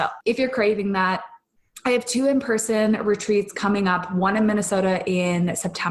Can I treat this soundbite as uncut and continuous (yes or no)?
yes